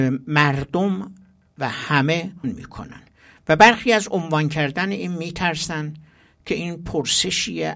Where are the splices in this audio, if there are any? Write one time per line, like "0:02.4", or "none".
0:02.4